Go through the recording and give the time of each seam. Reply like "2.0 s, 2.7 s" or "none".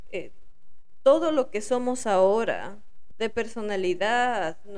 3.1 s